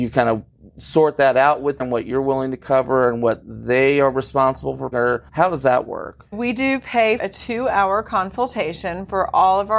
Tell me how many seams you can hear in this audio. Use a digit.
5